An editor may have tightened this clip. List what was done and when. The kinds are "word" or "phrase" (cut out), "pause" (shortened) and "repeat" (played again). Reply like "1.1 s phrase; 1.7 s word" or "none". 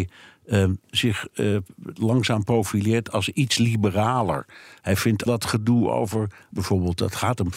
5.3 s word; 6.5 s word